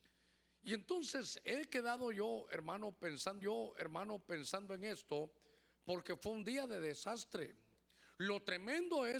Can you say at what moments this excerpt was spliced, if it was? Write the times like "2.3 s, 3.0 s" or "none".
3.4 s